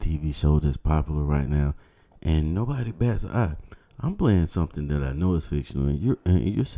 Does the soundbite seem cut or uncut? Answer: uncut